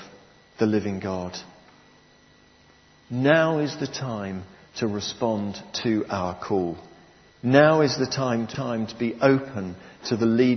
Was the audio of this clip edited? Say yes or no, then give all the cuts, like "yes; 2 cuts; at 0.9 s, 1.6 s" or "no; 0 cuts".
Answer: no; 0 cuts